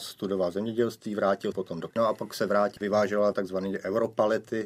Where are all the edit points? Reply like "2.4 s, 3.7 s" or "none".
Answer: 1.5 s, 1.9 s, 2.8 s